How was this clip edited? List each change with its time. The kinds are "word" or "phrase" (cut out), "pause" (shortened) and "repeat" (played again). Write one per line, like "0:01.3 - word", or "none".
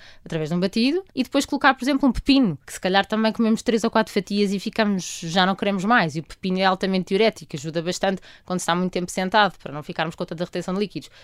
0:01.1 - pause
0:02.6 - pause